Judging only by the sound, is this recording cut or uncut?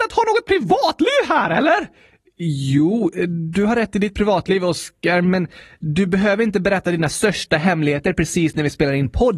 uncut